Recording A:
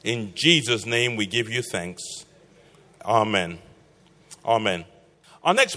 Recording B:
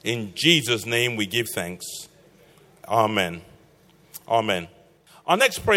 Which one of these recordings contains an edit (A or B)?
B